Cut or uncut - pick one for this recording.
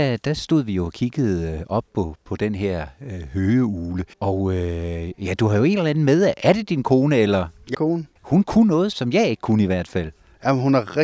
cut